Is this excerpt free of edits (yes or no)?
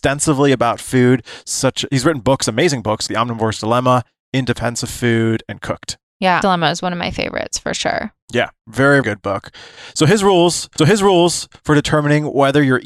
no